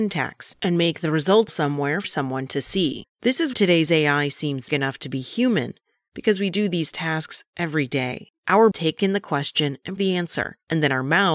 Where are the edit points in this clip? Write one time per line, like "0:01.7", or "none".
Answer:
0:01.5
0:02.0
0:03.5
0:04.7
0:08.7
0:10.0